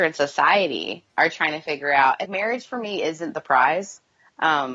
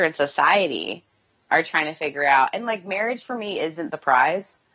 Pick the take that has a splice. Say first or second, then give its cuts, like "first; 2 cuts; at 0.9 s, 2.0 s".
first; 2 cuts; at 1.1 s, 2.2 s